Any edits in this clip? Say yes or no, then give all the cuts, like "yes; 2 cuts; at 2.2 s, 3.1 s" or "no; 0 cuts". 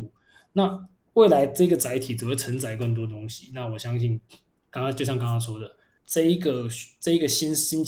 no; 0 cuts